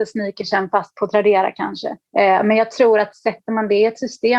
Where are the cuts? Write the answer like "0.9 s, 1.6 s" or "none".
2.1 s

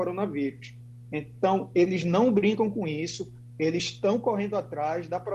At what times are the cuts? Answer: none

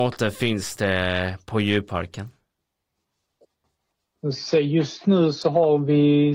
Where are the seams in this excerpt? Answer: none

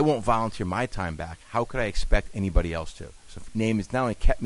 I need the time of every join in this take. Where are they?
3.5 s

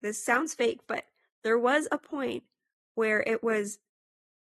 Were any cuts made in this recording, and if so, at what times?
none

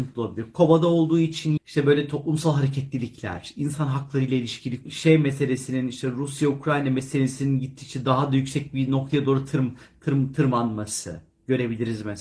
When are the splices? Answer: 1.6 s, 4.9 s

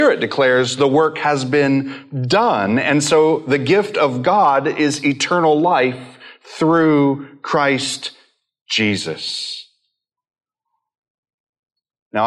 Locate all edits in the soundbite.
none

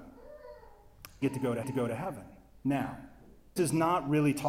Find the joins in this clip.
1.2 s, 1.6 s, 3.6 s

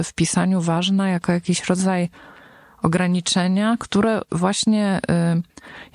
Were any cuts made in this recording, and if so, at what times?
none

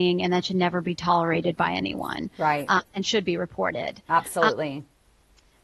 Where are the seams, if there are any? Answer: 2.9 s

